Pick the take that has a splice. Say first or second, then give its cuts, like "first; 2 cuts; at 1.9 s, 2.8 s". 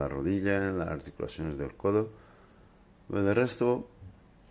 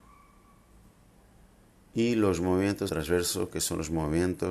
second; 1 cut; at 2.9 s